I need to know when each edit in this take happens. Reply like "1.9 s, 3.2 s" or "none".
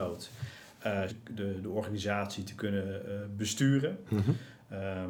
1.1 s